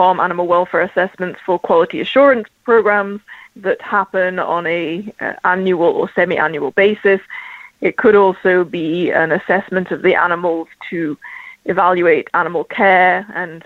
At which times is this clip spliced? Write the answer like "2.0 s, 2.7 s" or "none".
3.4 s